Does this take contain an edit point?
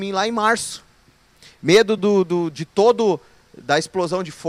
no; 0 cuts

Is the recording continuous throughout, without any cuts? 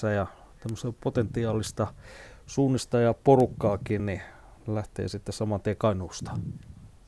yes; 0 cuts

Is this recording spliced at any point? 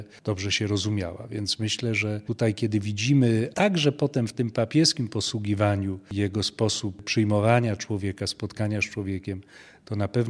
no; 0 cuts

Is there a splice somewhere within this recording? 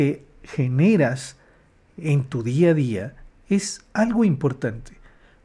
no; 0 cuts

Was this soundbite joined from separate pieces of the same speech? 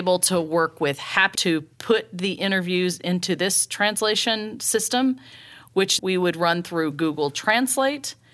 yes; 3 cuts; at 1.3 s, 1.7 s, 6.0 s

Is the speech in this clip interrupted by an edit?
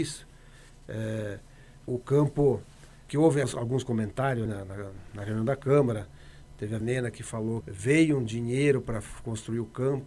yes; 6 cuts; at 1.9 s, 3.1 s, 3.4 s, 4.5 s, 6.8 s, 7.6 s

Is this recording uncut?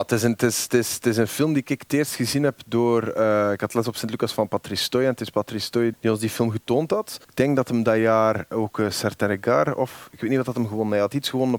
no; 2 cuts; at 5.9 s, 7.2 s

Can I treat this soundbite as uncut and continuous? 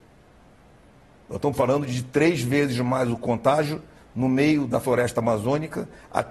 yes; 0 cuts

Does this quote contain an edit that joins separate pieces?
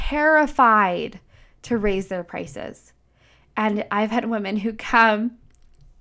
no; 0 cuts

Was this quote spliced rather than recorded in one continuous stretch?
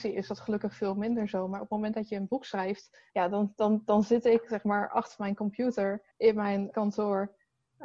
yes; 3 cuts; at 3.1 s, 6.1 s, 6.7 s

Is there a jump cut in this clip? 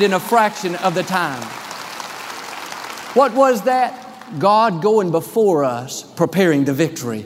no; 0 cuts

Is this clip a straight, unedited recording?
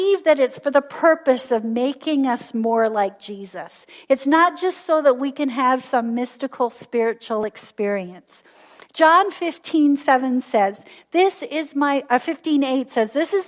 yes; 0 cuts

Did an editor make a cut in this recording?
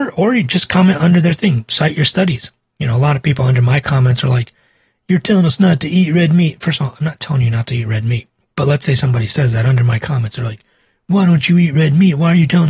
no; 0 cuts

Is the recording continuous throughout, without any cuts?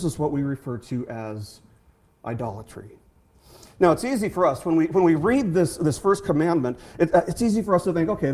yes; 0 cuts

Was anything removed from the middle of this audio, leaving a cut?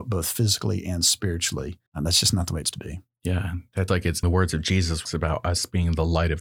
yes; 5 cuts; at 1.9 s, 2.7 s, 3.9 s, 4.2 s, 5.0 s

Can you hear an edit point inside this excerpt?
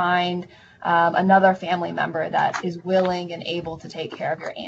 no; 0 cuts

